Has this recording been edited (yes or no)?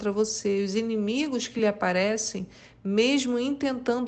no